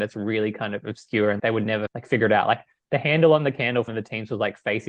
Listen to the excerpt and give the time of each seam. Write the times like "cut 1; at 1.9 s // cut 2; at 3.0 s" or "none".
cut 1; at 1.4 s // cut 2; at 1.9 s // cut 3; at 3.9 s